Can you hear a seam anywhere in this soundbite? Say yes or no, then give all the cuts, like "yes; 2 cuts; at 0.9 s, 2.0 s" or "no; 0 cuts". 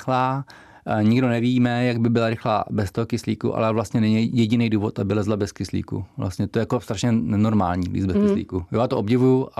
no; 0 cuts